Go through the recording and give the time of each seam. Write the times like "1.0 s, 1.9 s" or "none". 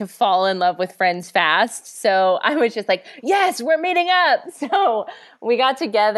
none

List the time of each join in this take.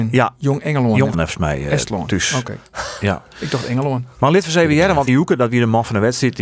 1.1 s, 5.1 s

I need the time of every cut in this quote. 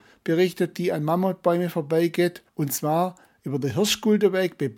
2.5 s

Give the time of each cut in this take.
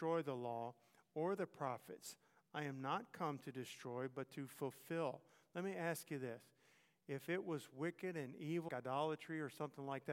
8.7 s

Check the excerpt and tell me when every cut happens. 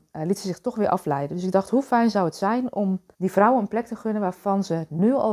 3.1 s

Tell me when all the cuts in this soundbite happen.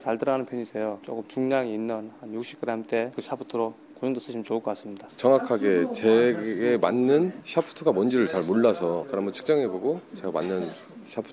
none

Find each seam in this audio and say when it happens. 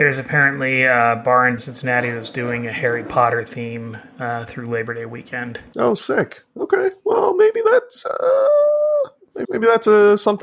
1.6 s, 9.4 s

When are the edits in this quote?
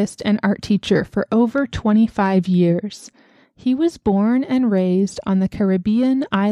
none

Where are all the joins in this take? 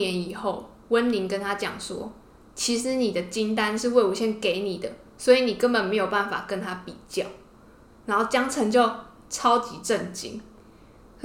none

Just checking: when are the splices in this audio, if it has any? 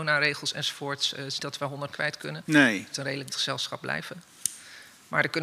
1.4 s, 1.9 s, 2.9 s, 3.3 s

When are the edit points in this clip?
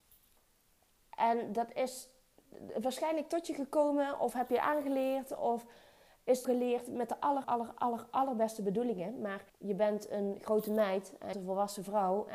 6.4 s, 7.4 s, 9.5 s, 11.3 s

